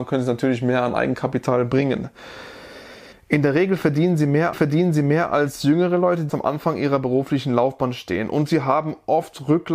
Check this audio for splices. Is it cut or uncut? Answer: cut